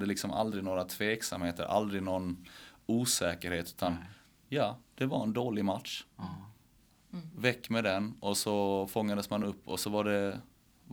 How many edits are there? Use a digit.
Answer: 0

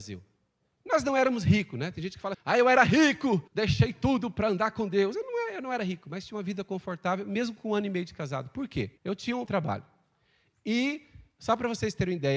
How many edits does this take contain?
4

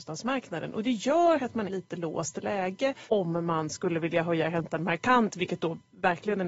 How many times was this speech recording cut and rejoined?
2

